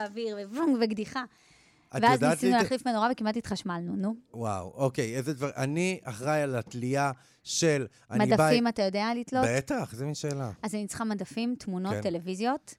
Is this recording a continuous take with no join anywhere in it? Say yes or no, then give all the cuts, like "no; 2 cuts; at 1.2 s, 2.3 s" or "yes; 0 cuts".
yes; 0 cuts